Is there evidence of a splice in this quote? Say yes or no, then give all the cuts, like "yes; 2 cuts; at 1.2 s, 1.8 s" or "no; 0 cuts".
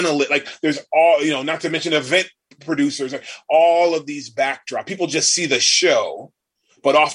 no; 0 cuts